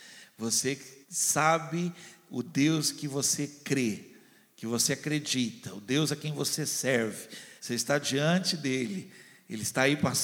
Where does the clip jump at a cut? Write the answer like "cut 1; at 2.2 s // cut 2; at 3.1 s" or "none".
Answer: cut 1; at 1.0 s // cut 2; at 7.6 s